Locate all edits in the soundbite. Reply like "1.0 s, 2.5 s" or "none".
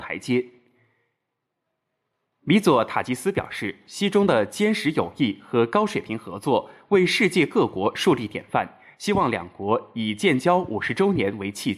none